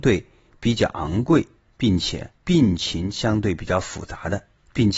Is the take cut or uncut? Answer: cut